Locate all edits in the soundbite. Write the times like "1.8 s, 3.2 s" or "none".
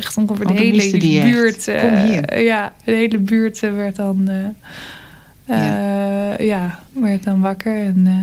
none